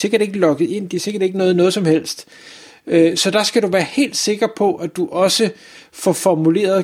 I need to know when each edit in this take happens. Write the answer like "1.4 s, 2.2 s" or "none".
none